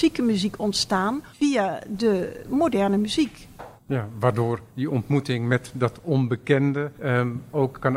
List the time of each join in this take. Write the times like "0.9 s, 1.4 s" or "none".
1.3 s, 3.8 s, 4.7 s, 6.9 s